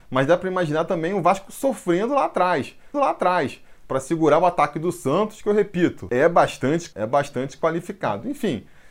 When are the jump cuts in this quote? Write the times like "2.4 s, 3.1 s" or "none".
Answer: 2.9 s, 6.9 s